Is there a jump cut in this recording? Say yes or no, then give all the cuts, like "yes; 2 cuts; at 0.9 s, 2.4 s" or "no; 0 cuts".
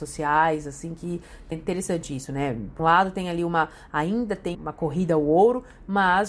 yes; 3 cuts; at 1.5 s, 2.8 s, 4.5 s